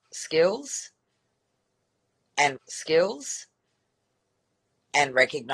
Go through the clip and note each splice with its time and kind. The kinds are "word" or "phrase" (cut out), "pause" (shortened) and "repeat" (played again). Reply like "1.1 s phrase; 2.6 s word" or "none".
2.6 s repeat